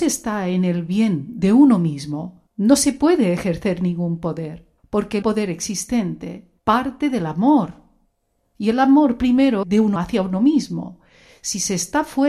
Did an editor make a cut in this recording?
yes; 7 cuts; at 2.5 s, 4.8 s, 5.2 s, 6.6 s, 8.1 s, 9.6 s, 10.0 s

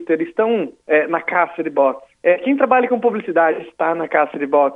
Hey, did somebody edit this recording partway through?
yes; 1 cut; at 2.1 s

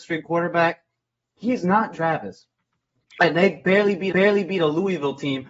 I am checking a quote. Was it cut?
yes; 2 cuts; at 1.9 s, 4.1 s

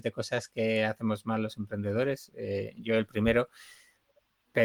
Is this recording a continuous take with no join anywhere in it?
yes; 0 cuts

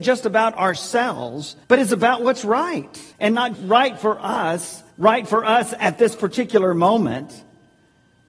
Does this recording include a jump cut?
yes; 4 cuts; at 1.6 s, 3.1 s, 3.5 s, 4.9 s

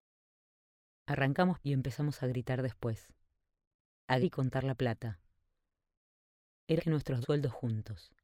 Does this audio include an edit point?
yes; 4 cuts; at 1.6 s, 4.2 s, 6.8 s, 7.2 s

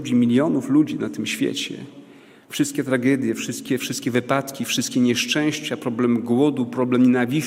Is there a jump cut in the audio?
no; 0 cuts

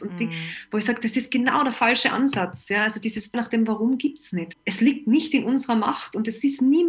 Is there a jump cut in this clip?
yes; 2 cuts; at 3.3 s, 4.5 s

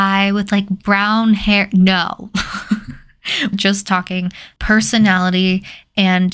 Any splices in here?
yes; 1 cut; at 3.5 s

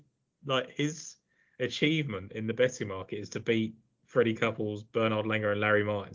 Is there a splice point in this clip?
no; 0 cuts

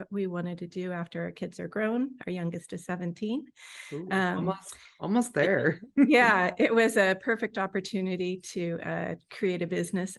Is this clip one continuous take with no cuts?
yes; 0 cuts

